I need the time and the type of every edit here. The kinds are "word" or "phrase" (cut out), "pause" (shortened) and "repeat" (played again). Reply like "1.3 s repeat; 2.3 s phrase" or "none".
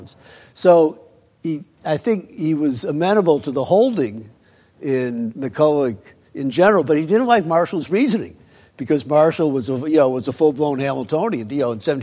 none